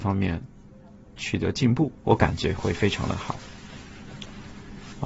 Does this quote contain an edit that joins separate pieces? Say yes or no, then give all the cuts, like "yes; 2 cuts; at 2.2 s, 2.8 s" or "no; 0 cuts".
yes; 1 cut; at 2.0 s